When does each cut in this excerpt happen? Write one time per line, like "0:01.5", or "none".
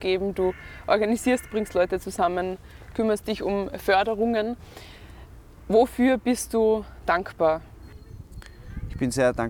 0:01.5